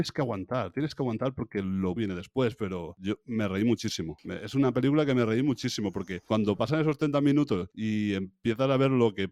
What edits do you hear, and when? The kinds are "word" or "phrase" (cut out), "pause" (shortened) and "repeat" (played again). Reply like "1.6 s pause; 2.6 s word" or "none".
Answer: 2.0 s word